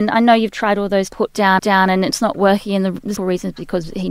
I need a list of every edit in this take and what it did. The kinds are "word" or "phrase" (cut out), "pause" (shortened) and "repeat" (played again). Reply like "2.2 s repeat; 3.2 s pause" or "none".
1.1 s phrase; 1.6 s repeat; 3.2 s word